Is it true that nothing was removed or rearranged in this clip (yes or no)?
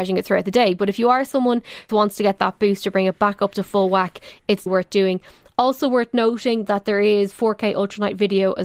no